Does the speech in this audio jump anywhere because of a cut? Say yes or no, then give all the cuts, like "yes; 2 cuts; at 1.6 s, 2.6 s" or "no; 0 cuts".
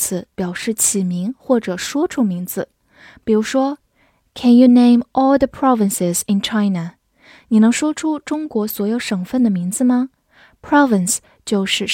no; 0 cuts